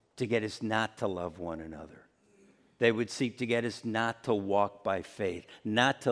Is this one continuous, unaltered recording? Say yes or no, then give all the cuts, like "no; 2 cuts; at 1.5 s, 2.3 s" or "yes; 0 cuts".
yes; 0 cuts